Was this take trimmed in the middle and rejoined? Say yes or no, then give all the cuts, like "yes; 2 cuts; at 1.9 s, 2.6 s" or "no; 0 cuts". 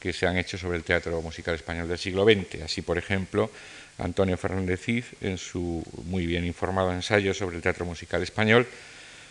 no; 0 cuts